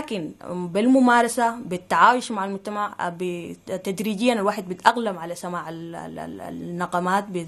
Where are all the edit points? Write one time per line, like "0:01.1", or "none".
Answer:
none